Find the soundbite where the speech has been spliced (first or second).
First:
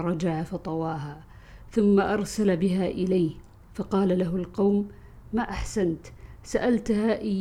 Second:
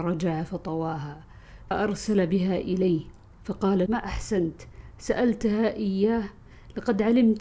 second